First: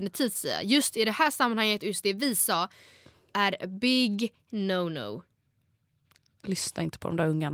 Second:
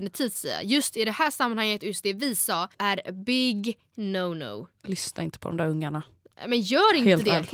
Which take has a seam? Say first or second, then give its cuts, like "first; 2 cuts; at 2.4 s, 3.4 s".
second; 2 cuts; at 2.7 s, 4.7 s